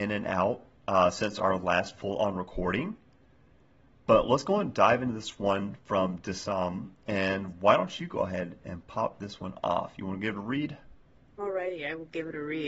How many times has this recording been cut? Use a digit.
0